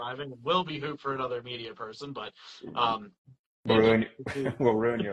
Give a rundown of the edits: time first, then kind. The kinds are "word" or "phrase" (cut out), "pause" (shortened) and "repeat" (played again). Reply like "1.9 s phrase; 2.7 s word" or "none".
3.7 s word